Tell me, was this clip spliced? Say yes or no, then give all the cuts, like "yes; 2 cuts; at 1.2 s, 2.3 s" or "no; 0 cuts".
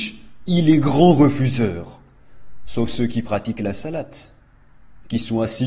no; 0 cuts